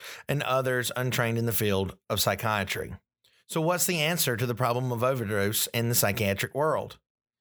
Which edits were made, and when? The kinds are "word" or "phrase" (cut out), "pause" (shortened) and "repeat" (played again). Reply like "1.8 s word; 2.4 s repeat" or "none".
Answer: 3.1 s pause